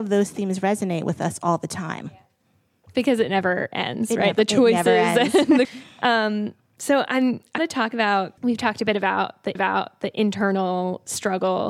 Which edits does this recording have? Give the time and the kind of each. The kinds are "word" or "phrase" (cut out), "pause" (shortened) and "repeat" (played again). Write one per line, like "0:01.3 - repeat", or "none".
0:05.6 - word
0:07.6 - word
0:08.4 - pause
0:09.6 - repeat